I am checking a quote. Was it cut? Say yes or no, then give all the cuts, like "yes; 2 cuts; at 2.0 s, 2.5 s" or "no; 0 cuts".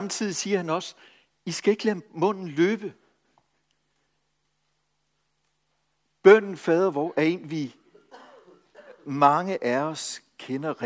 no; 0 cuts